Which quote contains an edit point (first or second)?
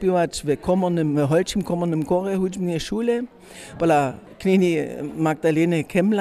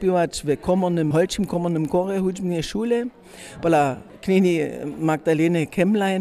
second